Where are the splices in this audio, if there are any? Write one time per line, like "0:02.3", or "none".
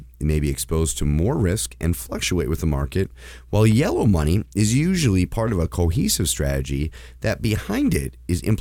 none